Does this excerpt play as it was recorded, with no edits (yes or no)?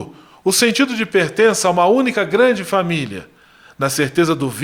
yes